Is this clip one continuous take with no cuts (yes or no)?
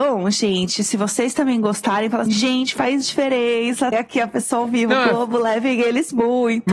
no